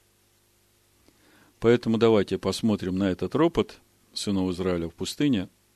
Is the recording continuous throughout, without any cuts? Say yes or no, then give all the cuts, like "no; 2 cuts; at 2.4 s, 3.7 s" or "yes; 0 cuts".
yes; 0 cuts